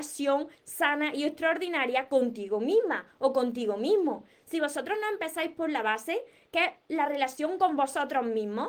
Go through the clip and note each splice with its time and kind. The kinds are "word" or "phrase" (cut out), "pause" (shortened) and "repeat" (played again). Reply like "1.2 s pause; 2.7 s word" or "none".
none